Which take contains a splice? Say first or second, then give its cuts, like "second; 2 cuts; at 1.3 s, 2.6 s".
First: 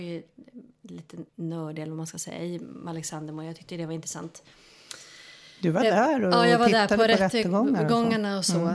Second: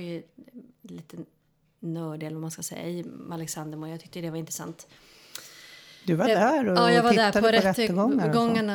first; 1 cut; at 1.3 s